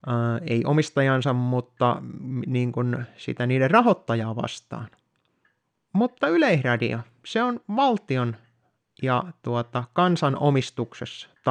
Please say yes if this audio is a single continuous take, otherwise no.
yes